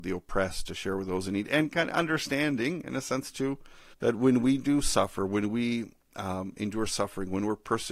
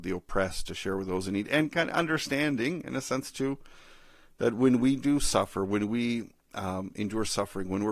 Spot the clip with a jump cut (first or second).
first